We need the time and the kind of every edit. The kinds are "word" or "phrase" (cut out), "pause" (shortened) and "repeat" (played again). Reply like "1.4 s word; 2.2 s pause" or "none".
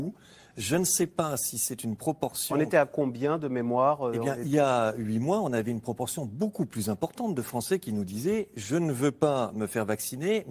none